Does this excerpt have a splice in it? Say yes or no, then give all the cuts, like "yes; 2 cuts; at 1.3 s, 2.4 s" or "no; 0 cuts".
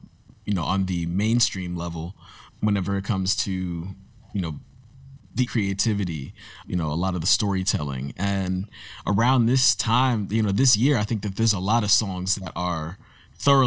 yes; 4 cuts; at 2.5 s, 5.2 s, 5.5 s, 6.6 s